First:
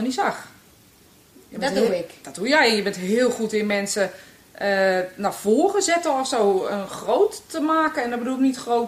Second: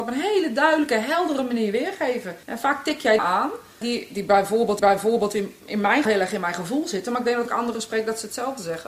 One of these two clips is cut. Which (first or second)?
second